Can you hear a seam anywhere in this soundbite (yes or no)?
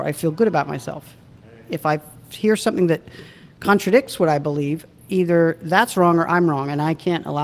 no